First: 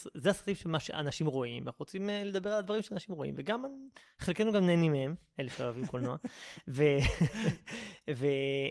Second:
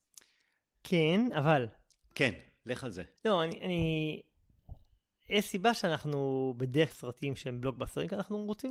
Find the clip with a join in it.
second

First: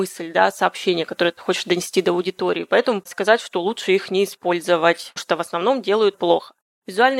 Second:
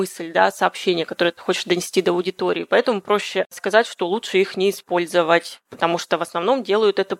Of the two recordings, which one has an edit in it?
first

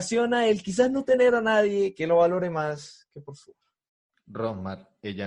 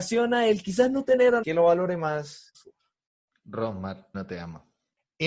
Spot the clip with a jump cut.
second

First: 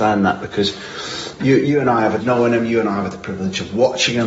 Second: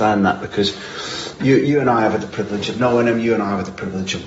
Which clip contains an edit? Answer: first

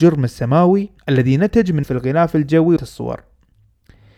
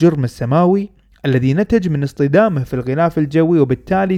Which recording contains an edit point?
first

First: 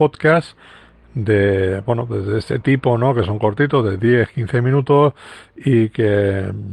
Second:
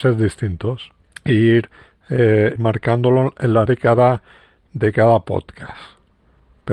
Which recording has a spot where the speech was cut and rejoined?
second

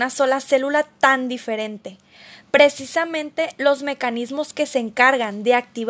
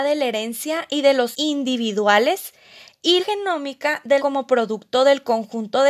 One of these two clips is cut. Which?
second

